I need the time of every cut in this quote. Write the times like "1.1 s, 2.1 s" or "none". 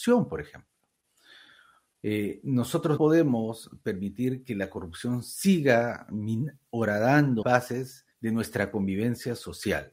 3.0 s, 7.4 s, 8.1 s